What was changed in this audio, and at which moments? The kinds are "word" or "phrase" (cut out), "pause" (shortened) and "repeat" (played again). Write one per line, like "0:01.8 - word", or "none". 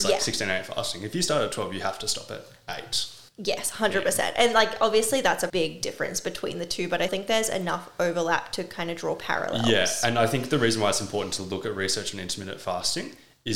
0:03.3 - pause
0:05.5 - word
0:07.1 - word